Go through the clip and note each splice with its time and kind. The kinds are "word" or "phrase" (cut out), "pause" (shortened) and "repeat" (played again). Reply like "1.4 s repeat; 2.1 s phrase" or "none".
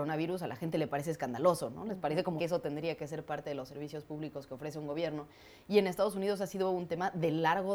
2.4 s word